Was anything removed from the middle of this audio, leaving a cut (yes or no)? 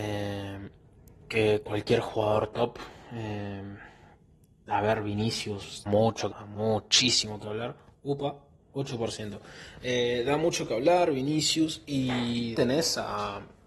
yes